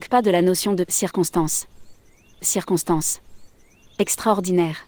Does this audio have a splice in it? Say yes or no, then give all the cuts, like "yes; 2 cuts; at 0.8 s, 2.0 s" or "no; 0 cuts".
yes; 1 cut; at 2.4 s